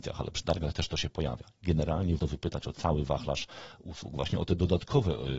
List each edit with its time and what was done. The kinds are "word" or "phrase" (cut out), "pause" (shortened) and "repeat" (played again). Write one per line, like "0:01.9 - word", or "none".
0:02.2 - word